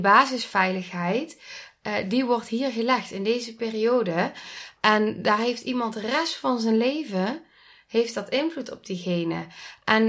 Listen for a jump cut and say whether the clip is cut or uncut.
uncut